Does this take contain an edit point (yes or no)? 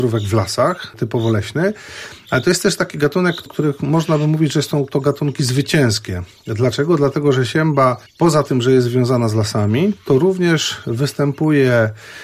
yes